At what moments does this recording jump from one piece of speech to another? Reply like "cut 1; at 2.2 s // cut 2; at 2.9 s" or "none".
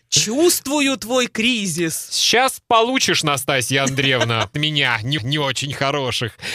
cut 1; at 4.5 s // cut 2; at 5.2 s